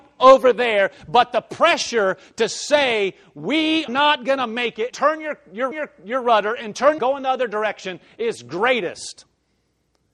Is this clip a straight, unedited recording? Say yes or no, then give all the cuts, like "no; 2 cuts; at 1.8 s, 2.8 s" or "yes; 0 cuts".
no; 4 cuts; at 3.9 s, 4.9 s, 5.7 s, 7.0 s